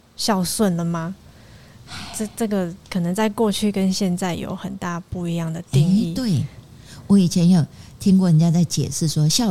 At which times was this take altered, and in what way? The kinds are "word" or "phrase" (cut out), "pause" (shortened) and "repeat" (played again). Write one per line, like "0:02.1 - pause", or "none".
0:02.8 - pause